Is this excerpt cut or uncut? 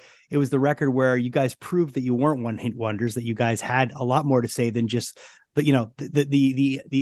uncut